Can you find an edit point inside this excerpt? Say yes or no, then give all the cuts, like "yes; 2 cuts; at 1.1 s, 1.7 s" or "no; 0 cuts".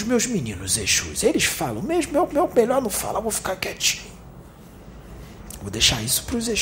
yes; 1 cut; at 2.3 s